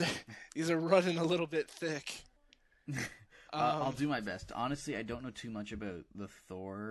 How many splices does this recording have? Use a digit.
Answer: 1